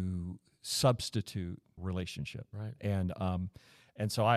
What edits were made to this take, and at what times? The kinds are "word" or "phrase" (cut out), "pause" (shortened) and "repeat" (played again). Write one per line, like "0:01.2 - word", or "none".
0:01.8 - phrase